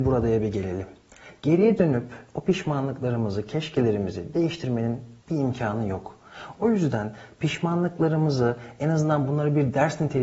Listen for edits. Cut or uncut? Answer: cut